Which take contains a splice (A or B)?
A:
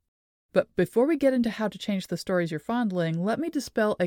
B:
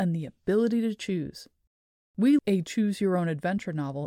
B